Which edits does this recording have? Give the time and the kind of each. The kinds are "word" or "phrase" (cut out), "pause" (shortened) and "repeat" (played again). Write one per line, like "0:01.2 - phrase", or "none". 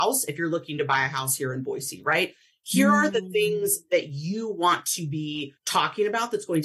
0:05.6 - pause